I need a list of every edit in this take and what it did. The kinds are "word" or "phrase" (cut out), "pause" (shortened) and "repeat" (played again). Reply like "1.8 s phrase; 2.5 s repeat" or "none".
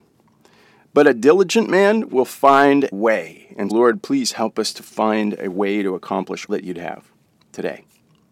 2.9 s word; 3.7 s word; 6.5 s word